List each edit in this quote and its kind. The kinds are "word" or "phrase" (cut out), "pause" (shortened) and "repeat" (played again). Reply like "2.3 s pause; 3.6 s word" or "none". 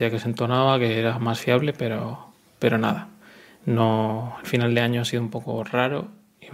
none